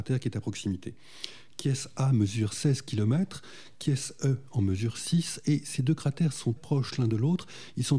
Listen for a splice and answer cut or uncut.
cut